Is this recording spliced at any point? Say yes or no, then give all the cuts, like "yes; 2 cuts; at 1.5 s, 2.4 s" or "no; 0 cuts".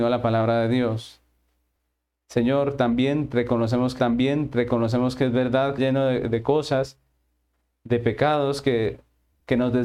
yes; 2 cuts; at 4.0 s, 5.8 s